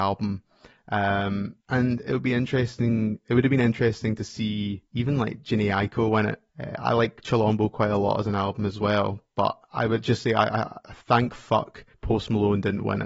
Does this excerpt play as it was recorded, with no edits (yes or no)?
no